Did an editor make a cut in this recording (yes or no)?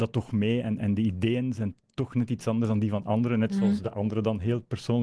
no